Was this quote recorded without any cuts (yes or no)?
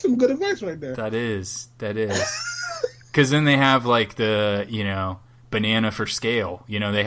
yes